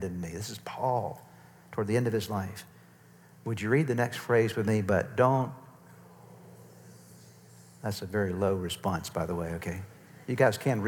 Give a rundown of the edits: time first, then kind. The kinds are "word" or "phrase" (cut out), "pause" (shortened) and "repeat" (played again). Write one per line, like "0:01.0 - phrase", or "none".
none